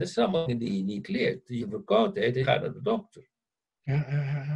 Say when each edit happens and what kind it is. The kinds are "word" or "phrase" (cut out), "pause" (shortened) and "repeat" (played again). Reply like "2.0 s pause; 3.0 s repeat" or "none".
1.6 s word; 2.4 s word